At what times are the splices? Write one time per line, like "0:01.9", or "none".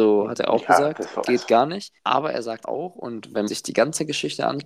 0:01.2
0:02.0
0:02.6
0:03.5